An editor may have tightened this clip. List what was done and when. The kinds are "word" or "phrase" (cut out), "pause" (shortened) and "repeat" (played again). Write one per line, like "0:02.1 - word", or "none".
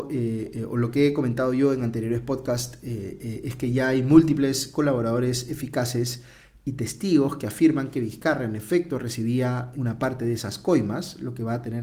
0:09.7 - word